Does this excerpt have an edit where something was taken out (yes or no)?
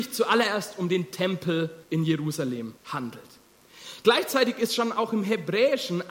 yes